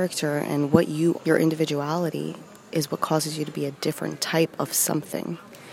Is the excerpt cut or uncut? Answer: cut